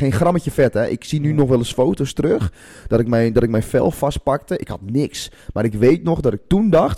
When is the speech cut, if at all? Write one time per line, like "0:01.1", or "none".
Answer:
none